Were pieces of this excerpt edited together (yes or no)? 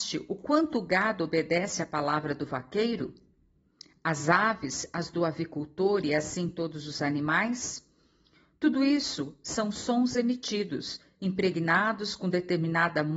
no